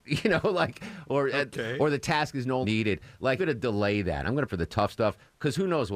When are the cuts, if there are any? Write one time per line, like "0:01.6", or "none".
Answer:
0:02.6
0:03.4
0:04.5